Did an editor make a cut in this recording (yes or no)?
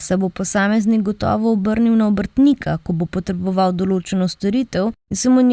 no